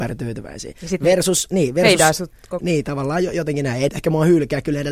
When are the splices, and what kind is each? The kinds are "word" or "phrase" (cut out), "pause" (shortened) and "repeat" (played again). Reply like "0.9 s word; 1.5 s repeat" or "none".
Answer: 2.6 s word; 3.9 s phrase